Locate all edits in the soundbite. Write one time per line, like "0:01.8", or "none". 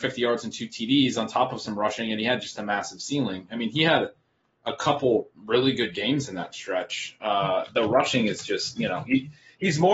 0:05.3